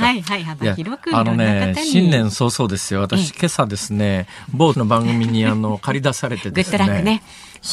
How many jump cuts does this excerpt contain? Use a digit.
1